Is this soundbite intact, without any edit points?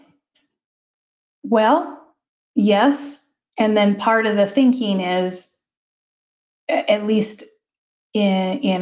yes; 0 cuts

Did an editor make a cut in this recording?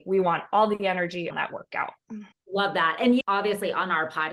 yes; 3 cuts; at 1.3 s, 2.3 s, 3.2 s

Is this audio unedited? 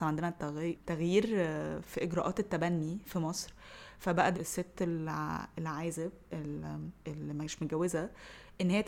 no; 2 cuts; at 1.8 s, 4.3 s

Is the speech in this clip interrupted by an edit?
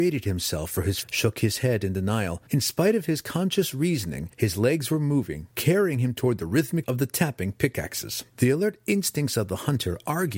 yes; 5 cuts; at 1.0 s, 2.5 s, 4.3 s, 6.8 s, 8.3 s

